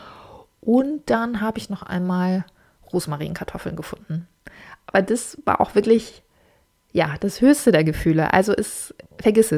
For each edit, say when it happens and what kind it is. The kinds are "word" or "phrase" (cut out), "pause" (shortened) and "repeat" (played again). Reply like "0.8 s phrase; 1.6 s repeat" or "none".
none